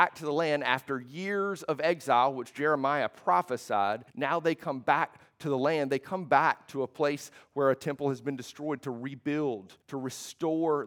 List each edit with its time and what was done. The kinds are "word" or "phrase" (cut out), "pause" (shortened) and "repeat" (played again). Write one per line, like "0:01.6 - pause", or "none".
0:04.1 - pause
0:09.8 - pause